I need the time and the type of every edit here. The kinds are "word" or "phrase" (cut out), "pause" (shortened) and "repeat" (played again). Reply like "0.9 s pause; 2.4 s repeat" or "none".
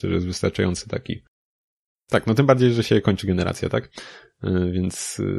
none